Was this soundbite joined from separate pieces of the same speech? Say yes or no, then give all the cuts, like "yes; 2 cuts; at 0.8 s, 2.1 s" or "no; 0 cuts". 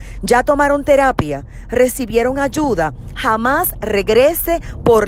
no; 0 cuts